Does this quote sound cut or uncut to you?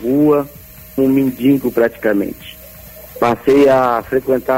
cut